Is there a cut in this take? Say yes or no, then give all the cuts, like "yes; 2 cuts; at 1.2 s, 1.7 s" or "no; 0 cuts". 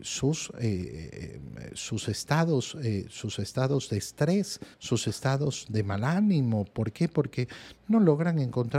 yes; 1 cut; at 4.7 s